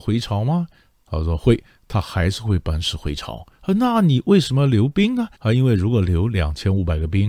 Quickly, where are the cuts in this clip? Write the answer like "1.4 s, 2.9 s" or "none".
3.5 s, 5.3 s